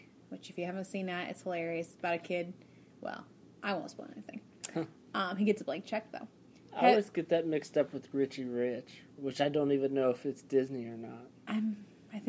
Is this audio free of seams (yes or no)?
yes